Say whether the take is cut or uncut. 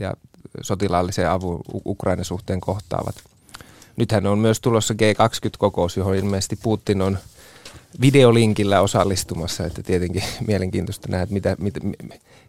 uncut